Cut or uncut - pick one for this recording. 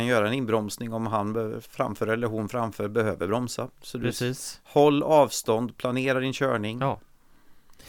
uncut